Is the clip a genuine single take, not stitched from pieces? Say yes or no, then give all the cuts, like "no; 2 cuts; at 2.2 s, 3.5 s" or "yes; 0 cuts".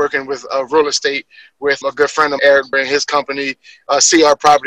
no; 3 cuts; at 1.8 s, 2.4 s, 2.7 s